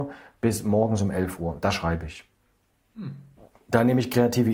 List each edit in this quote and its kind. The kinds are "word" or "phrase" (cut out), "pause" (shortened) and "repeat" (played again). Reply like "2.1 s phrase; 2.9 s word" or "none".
3.3 s pause